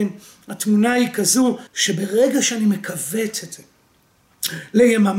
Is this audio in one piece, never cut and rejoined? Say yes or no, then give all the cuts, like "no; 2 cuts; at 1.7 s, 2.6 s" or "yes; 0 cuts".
no; 1 cut; at 1.7 s